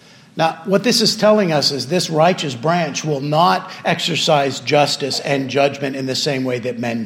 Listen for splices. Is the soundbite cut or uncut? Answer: uncut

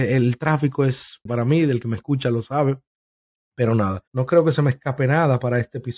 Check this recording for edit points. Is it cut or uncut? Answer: cut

